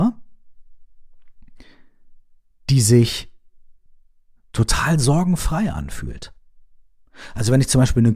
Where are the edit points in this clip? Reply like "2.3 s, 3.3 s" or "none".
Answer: none